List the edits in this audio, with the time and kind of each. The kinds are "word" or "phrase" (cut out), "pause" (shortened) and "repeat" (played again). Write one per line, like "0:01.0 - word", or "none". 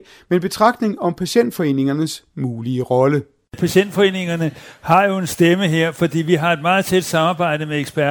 none